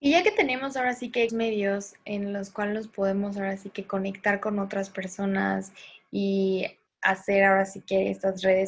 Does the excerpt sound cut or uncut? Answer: cut